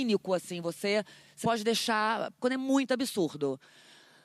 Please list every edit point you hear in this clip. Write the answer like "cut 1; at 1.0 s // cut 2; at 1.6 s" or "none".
cut 1; at 1.4 s // cut 2; at 2.4 s